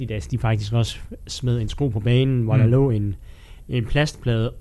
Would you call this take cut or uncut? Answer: uncut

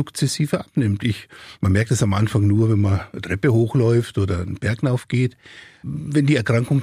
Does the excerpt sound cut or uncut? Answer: uncut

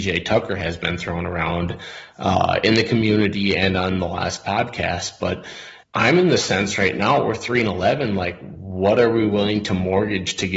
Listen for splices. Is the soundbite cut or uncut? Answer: cut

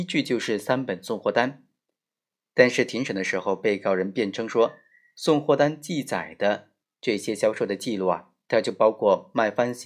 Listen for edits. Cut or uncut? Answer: uncut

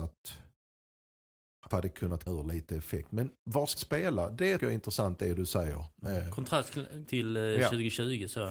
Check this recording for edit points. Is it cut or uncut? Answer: cut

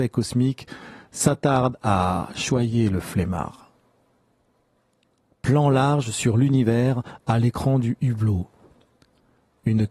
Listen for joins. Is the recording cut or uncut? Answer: uncut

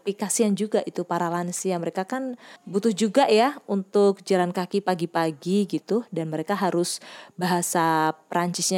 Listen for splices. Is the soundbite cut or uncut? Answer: uncut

